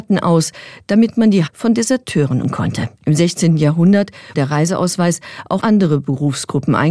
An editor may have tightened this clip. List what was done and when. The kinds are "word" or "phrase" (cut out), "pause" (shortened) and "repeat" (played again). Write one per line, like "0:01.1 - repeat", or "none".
0:01.5 - word
0:02.4 - word
0:03.0 - pause
0:04.3 - word
0:05.6 - word